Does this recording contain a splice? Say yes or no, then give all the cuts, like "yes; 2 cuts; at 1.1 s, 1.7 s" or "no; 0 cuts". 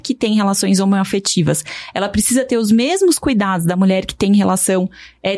no; 0 cuts